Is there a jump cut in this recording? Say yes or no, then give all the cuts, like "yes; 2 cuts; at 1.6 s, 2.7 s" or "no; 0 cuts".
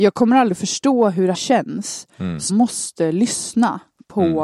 yes; 2 cuts; at 1.3 s, 2.5 s